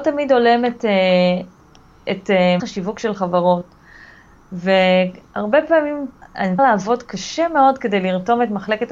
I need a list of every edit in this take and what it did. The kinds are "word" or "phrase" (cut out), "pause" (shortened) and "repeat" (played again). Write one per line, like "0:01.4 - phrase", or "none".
0:02.6 - word
0:06.2 - word
0:06.6 - word